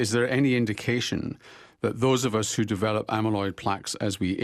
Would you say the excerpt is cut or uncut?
uncut